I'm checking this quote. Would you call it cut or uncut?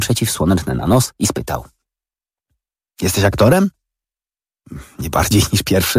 uncut